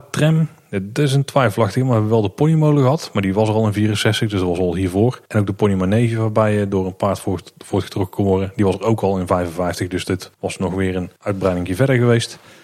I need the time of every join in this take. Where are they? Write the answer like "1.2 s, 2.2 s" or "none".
5.3 s, 10.3 s, 11.2 s